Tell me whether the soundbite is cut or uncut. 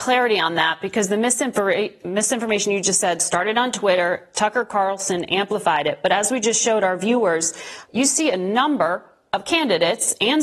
uncut